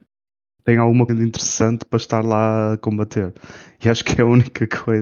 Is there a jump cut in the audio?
yes; 1 cut; at 1.1 s

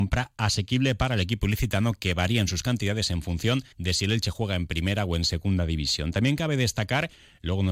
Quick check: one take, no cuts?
no; 1 cut; at 3.7 s

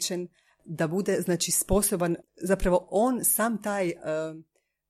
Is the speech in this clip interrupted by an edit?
yes; 1 cut; at 2.3 s

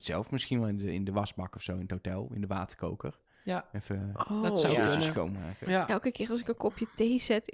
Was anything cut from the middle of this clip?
no; 0 cuts

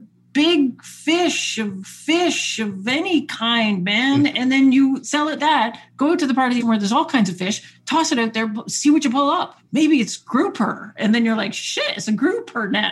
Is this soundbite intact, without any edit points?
no; 3 cuts; at 1.8 s, 5.4 s, 6.6 s

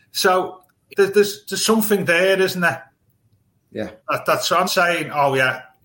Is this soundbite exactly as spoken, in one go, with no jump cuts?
no; 3 cuts; at 0.9 s, 4.0 s, 4.7 s

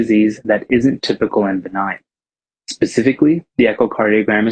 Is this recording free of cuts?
yes; 0 cuts

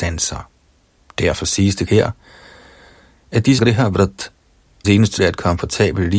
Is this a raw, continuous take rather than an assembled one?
no; 4 cuts; at 1.9 s, 3.6 s, 4.8 s, 5.2 s

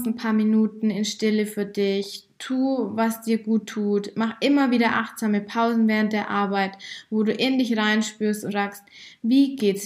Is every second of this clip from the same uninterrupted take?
no; 1 cut; at 8.5 s

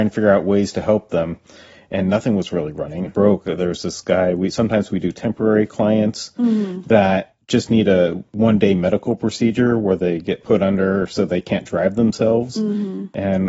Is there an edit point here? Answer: yes; 1 cut; at 3.1 s

